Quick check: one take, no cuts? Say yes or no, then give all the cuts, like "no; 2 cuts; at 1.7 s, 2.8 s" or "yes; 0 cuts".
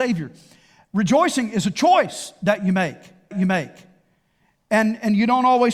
no; 1 cut; at 3.3 s